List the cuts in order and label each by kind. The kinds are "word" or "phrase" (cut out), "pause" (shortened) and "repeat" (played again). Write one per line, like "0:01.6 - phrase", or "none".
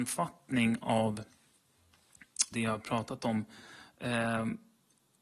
0:02.5 - word